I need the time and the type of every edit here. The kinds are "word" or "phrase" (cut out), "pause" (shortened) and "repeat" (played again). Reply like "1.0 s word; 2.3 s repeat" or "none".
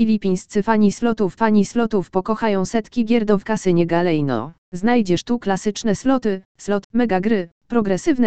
1.4 s repeat; 3.4 s word; 4.6 s pause; 6.8 s word